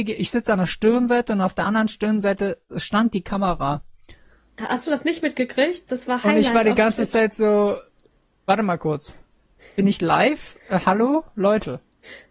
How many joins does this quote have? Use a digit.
0